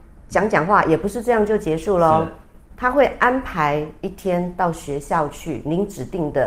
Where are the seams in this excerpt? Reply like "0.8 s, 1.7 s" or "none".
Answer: none

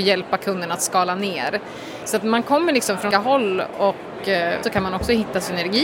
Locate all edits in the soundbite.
2.2 s, 3.1 s, 4.6 s

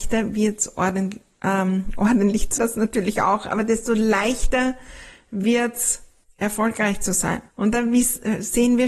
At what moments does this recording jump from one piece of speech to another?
2.6 s, 6.2 s, 7.5 s

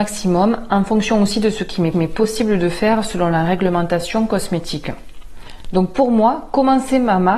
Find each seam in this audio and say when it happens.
1.9 s

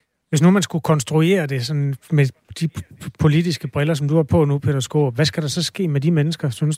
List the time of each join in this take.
none

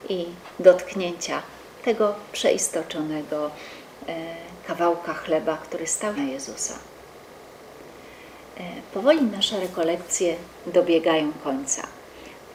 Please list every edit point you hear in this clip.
6.2 s

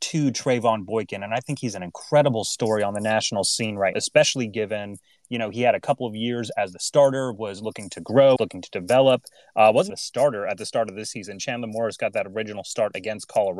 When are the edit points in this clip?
3.9 s, 8.4 s, 9.9 s

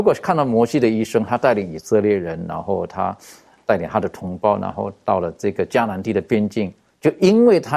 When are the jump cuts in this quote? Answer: none

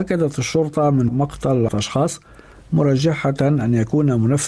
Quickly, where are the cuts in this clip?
1.1 s, 1.7 s

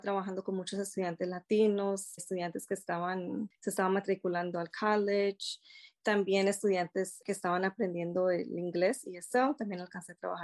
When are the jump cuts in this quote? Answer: 2.2 s

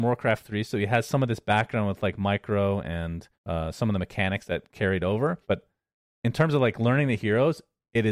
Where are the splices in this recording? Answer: 3.3 s, 5.4 s

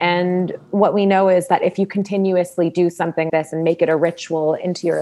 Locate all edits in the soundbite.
3.3 s

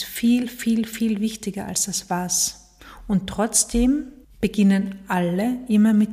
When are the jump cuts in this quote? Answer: 4.2 s

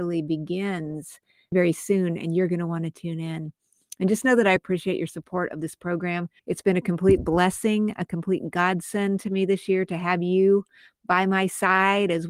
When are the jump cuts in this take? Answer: 1.5 s, 4.6 s, 6.4 s

